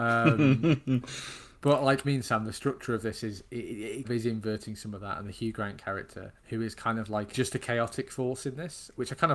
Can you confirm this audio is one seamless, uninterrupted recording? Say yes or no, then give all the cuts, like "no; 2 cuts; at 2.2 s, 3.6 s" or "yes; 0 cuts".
no; 4 cuts; at 2.0 s, 4.0 s, 6.4 s, 7.3 s